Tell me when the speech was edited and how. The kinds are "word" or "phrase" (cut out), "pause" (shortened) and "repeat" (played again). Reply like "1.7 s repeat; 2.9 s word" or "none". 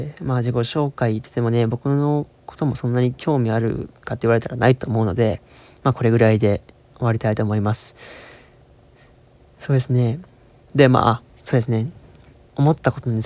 none